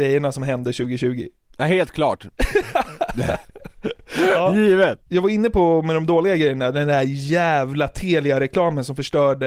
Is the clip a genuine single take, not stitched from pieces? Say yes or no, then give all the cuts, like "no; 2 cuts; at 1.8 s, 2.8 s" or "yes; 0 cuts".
no; 1 cut; at 5.0 s